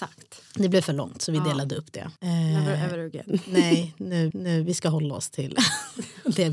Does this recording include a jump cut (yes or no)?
yes